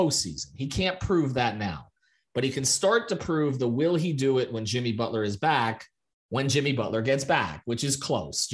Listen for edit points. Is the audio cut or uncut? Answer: uncut